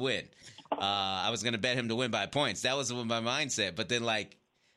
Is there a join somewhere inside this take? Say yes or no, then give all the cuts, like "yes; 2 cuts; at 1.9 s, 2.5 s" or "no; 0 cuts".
no; 0 cuts